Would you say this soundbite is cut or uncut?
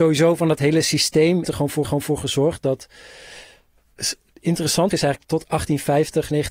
cut